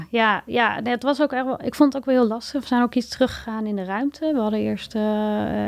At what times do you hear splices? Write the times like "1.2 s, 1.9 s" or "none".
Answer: none